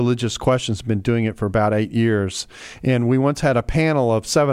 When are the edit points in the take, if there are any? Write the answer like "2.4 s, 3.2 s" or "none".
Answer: none